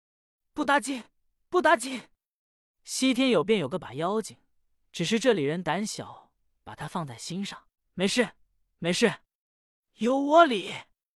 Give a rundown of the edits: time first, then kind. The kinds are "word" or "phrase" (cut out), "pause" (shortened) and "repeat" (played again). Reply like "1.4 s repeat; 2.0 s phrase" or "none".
7.8 s pause